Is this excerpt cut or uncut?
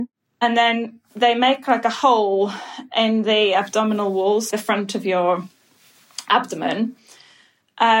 cut